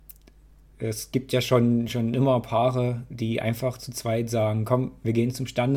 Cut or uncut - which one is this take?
uncut